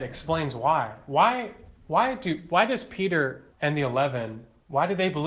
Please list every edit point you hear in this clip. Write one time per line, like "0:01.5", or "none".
0:03.5